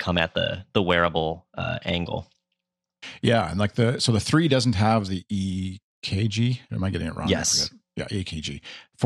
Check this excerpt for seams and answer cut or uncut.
uncut